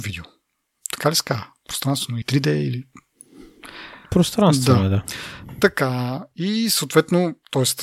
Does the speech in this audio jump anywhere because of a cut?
yes; 1 cut; at 2.2 s

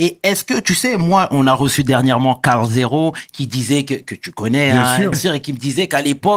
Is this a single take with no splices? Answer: no; 1 cut; at 5.1 s

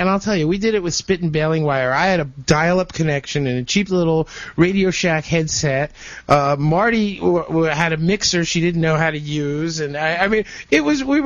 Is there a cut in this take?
no; 0 cuts

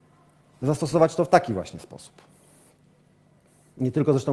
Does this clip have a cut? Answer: no; 0 cuts

